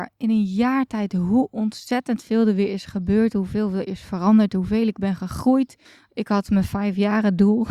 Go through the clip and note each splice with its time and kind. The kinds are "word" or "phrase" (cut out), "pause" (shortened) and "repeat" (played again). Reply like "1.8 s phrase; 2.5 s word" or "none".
5.8 s pause